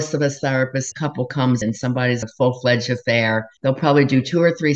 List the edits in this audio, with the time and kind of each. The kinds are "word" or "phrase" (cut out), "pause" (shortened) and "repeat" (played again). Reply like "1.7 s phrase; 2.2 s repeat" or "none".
0.9 s phrase; 1.6 s word; 2.2 s word; 3.6 s pause